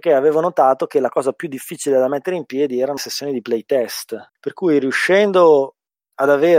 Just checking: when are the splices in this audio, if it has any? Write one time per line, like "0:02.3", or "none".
0:03.0
0:04.3